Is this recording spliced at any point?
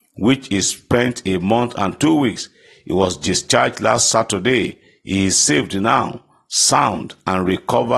no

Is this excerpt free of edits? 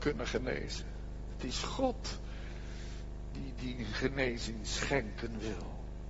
yes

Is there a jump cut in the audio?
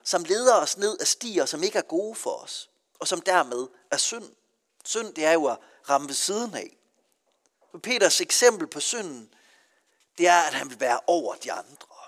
no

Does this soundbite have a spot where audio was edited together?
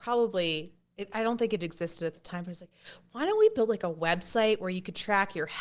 no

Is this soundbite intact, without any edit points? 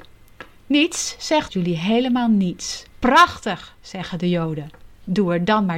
no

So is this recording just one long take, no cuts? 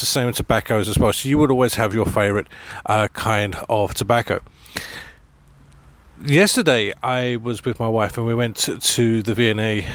yes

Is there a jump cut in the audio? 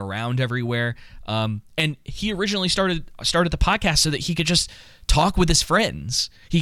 no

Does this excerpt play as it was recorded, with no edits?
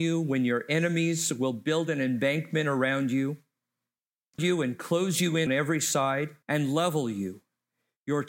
no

